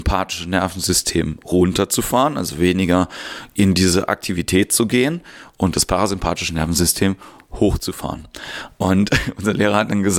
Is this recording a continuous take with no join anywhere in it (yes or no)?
yes